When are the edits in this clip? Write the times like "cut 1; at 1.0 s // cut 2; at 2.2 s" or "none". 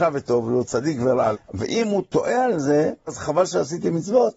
cut 1; at 1.3 s // cut 2; at 3.1 s